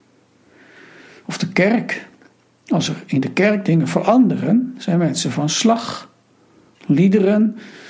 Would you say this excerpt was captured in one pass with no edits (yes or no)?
yes